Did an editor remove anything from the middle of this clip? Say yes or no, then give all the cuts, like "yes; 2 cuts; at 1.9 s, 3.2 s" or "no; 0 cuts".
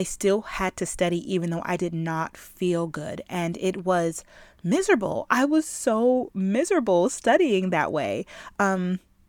no; 0 cuts